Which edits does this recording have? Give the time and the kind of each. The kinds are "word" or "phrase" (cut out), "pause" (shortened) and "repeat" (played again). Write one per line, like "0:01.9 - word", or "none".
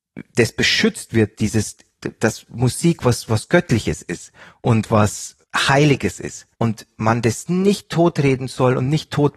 0:05.4 - pause
0:06.5 - pause